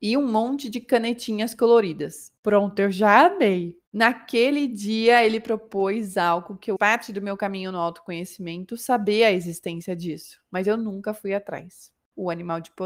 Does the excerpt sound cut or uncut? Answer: cut